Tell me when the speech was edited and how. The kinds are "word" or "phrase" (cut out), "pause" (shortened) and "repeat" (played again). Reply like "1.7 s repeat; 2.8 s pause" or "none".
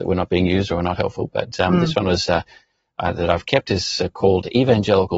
none